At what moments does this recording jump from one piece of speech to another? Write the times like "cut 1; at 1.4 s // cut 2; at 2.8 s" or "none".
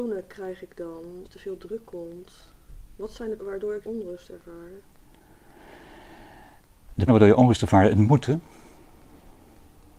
cut 1; at 1.2 s // cut 2; at 3.4 s // cut 3; at 3.8 s // cut 4; at 7.1 s